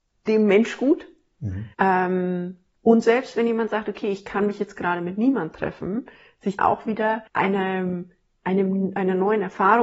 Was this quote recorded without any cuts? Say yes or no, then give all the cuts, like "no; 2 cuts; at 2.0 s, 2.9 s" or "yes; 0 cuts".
no; 3 cuts; at 1.7 s, 6.6 s, 7.3 s